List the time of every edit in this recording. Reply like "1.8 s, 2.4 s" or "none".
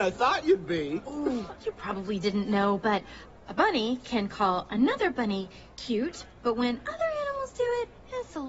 1.5 s